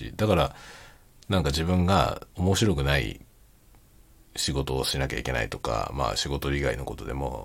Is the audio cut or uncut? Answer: uncut